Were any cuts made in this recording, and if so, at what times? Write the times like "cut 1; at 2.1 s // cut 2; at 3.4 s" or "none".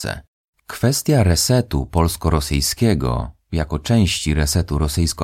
none

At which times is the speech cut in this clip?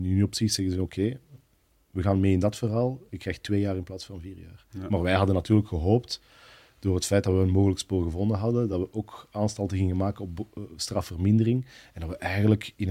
none

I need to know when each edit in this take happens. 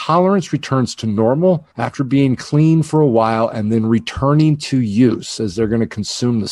cut 1; at 1.7 s

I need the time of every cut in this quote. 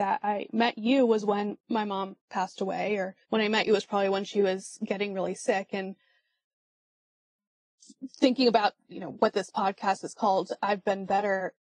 cut 1; at 3.2 s

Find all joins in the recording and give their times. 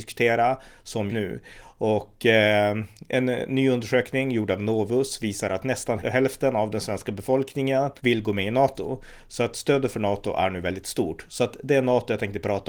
cut 1; at 1.1 s // cut 2; at 6.0 s // cut 3; at 8.0 s

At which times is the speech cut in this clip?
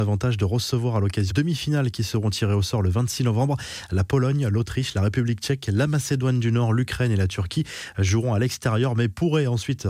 cut 1; at 1.3 s

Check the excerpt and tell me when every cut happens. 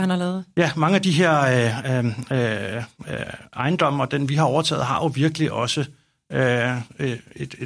none

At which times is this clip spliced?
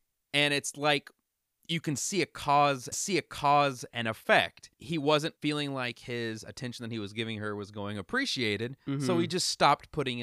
cut 1; at 2.9 s // cut 2; at 4.7 s // cut 3; at 5.4 s

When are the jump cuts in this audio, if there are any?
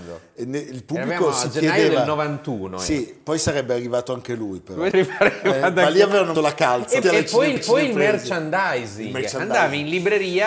cut 1; at 4.9 s // cut 2; at 6.4 s // cut 3; at 7.0 s // cut 4; at 7.6 s

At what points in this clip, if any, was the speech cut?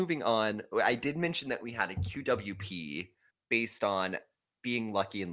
cut 1; at 3.3 s

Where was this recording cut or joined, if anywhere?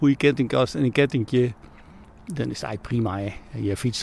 none

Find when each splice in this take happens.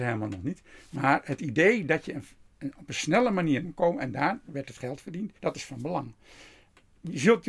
cut 1; at 3.6 s // cut 2; at 5.4 s

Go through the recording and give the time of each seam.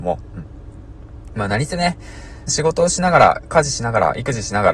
cut 1; at 2.5 s

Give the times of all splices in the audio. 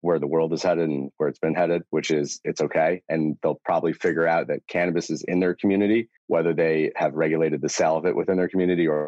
cut 1; at 6.2 s

